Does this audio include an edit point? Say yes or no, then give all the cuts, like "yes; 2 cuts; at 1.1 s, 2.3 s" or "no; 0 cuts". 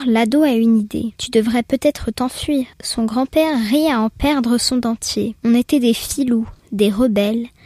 yes; 3 cuts; at 1.2 s, 2.7 s, 5.4 s